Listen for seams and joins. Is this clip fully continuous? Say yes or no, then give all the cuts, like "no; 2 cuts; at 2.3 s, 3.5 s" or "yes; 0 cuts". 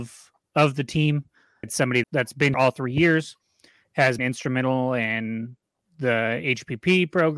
no; 4 cuts; at 1.6 s, 2.0 s, 2.5 s, 4.2 s